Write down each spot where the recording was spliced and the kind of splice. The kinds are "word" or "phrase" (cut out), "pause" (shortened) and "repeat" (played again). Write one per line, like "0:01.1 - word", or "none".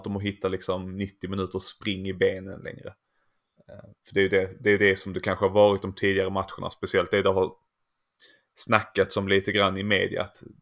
0:04.0 - pause